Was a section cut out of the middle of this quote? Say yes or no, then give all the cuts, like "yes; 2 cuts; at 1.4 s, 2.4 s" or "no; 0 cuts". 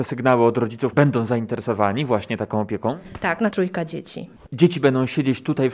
yes; 2 cuts; at 0.9 s, 3.5 s